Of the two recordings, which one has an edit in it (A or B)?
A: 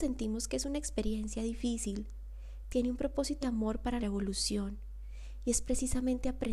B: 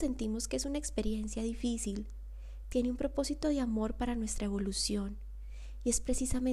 A